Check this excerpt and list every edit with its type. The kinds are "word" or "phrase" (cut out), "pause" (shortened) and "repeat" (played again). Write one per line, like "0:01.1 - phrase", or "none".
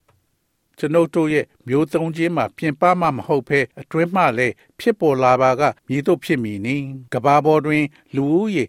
0:03.7 - pause
0:05.8 - pause
0:07.1 - pause